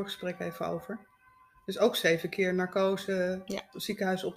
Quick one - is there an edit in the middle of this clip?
no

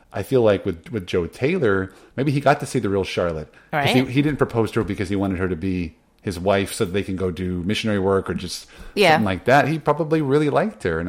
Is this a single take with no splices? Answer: yes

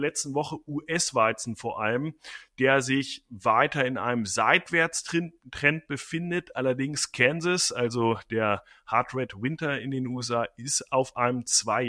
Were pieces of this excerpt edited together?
no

